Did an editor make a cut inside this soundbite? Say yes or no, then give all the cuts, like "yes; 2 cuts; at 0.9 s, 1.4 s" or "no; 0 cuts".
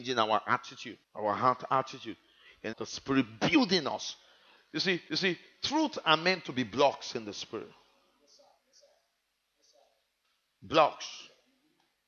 yes; 3 cuts; at 1.0 s, 2.7 s, 5.1 s